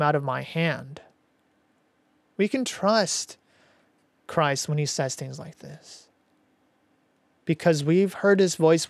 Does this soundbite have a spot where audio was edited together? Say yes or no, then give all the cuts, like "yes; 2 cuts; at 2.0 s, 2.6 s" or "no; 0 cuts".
no; 0 cuts